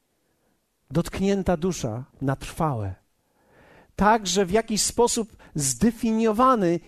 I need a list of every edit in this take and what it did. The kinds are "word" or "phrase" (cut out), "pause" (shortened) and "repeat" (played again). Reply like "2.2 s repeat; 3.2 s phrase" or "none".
2.1 s pause